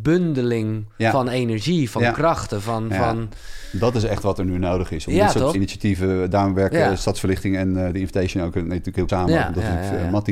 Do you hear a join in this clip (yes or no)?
yes